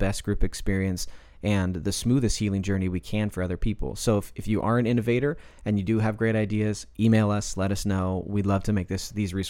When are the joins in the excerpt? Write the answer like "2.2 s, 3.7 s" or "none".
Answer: none